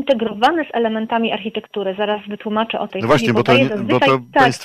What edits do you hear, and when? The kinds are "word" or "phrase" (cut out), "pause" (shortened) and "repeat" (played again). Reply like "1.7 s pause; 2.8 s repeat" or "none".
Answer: 2.9 s word